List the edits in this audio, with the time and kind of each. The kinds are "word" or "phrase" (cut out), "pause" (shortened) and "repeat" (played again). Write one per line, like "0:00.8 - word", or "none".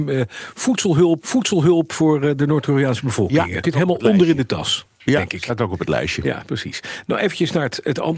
0:01.2 - repeat
0:03.6 - word

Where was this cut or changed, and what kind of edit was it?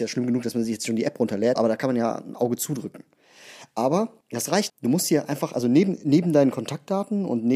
0:01.6 - word
0:04.2 - pause
0:04.7 - word

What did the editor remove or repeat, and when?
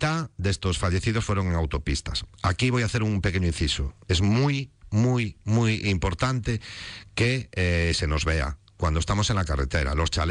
none

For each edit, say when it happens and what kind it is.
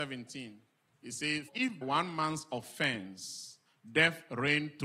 0:01.5 - word
0:01.8 - word
0:03.7 - pause

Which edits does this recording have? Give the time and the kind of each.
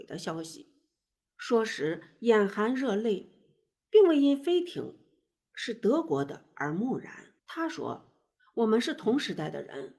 0:07.4 - pause

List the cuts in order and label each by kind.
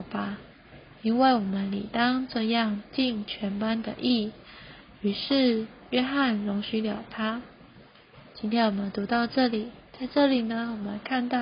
0:09.9 - pause

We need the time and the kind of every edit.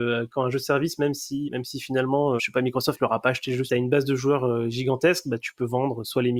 0:01.5 - word
0:02.4 - word
0:03.7 - phrase

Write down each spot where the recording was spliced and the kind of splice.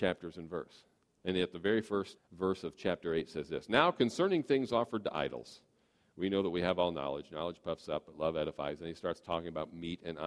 0:02.2 - word

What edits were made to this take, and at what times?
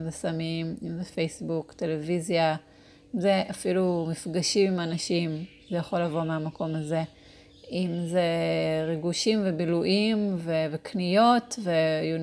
none

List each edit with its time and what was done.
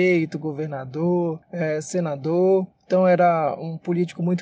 0:01.4 - pause
0:02.7 - pause

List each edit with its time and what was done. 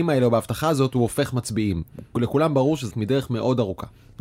0:02.9 - word

